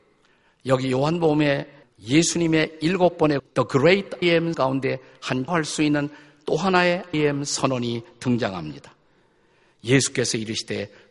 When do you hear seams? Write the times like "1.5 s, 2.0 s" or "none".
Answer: 1.8 s, 3.4 s, 4.2 s, 4.5 s, 5.5 s, 7.1 s

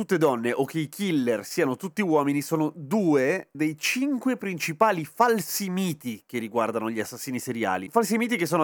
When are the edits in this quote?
3.5 s

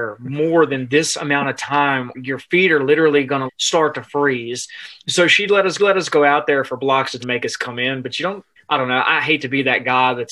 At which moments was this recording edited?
2.1 s, 3.5 s, 5.8 s, 7.2 s, 8.6 s

